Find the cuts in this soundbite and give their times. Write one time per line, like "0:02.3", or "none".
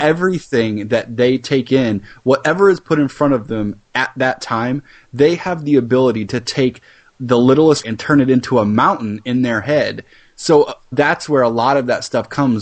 0:03.8
0:07.8
0:10.9